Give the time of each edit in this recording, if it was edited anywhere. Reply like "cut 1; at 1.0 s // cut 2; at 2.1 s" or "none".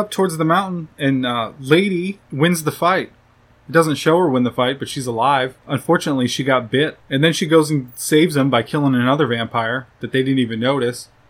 none